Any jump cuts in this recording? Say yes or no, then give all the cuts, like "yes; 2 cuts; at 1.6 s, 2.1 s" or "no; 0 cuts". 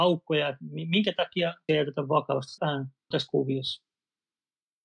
yes; 3 cuts; at 1.7 s, 2.6 s, 3.1 s